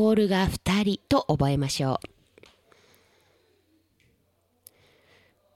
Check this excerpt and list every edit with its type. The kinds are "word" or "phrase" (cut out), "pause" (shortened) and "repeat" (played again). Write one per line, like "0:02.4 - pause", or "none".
0:01.1 - pause